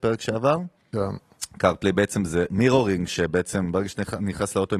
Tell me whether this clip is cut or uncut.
cut